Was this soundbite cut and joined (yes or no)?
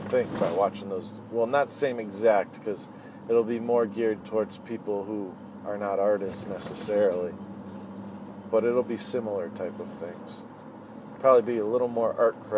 no